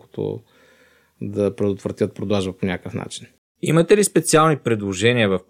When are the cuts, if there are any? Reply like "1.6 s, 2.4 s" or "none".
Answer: none